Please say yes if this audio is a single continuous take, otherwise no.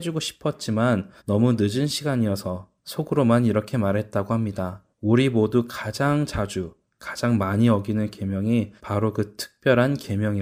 no